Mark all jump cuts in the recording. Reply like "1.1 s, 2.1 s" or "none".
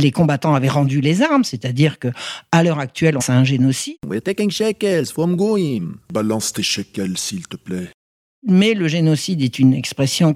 3.2 s